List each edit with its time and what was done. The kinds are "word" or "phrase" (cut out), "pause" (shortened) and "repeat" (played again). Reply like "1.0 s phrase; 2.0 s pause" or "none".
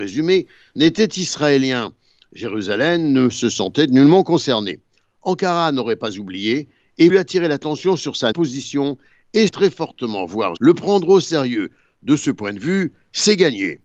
7.1 s word; 8.3 s word; 9.5 s word; 10.6 s word